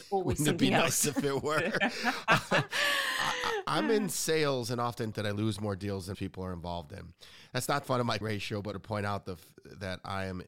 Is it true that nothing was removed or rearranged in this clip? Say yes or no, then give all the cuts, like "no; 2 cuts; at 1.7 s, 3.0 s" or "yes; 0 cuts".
no; 5 cuts; at 5.1 s, 6.1 s, 7.8 s, 8.2 s, 8.7 s